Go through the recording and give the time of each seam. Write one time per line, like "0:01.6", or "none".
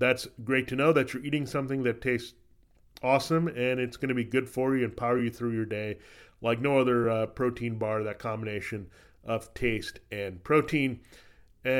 none